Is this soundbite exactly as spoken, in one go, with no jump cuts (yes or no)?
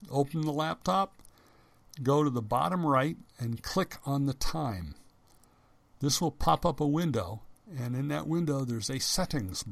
yes